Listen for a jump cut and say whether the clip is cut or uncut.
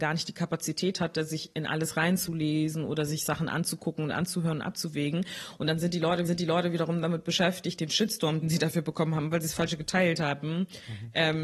cut